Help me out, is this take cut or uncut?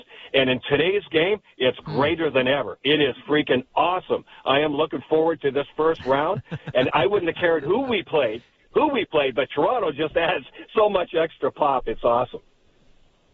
uncut